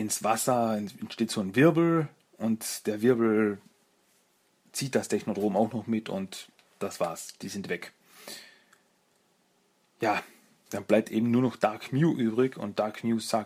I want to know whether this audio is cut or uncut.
uncut